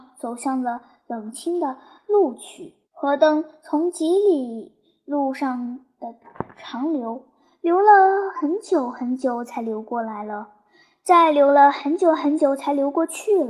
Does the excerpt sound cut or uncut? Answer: cut